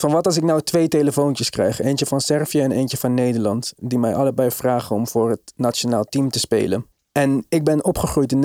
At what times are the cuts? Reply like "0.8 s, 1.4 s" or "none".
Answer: 6.9 s